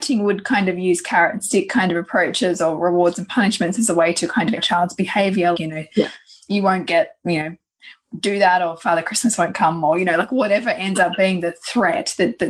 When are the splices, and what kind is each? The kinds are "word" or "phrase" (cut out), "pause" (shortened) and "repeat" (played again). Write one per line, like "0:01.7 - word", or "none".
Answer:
0:04.6 - word
0:05.5 - word